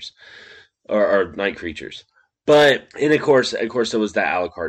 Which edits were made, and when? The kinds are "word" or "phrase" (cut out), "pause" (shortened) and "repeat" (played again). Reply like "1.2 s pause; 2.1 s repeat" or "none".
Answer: 2.9 s pause